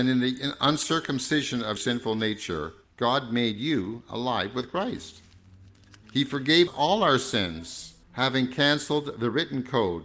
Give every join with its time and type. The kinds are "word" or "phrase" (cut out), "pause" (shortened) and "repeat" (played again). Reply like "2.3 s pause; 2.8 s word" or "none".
1.8 s word; 2.8 s pause; 6.0 s pause; 6.7 s word; 8.0 s pause